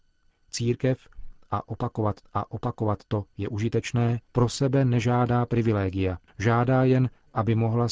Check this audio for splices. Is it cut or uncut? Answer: cut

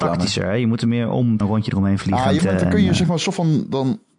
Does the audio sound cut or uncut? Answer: cut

